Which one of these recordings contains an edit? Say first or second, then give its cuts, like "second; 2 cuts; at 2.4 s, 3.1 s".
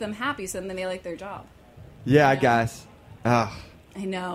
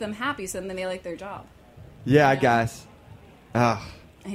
first; 1 cut; at 3.2 s